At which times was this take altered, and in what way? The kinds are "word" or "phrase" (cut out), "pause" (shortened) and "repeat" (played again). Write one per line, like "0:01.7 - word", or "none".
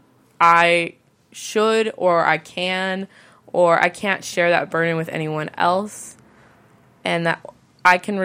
none